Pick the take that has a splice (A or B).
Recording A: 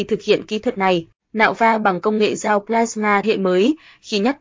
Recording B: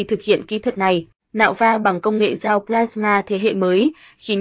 A